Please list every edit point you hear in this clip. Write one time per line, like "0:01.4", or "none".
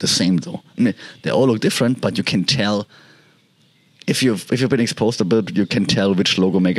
none